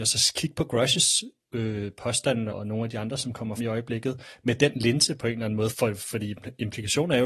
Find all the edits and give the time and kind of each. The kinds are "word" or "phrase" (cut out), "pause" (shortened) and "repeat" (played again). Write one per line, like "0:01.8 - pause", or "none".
0:02.5 - word
0:03.6 - word
0:05.7 - word